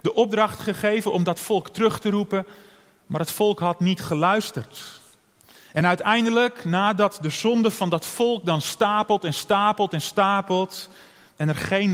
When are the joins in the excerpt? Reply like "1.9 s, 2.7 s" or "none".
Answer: none